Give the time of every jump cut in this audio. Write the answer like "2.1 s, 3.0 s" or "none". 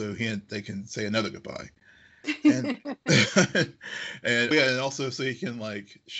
4.5 s